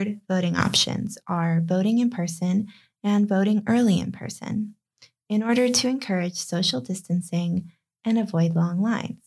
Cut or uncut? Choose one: uncut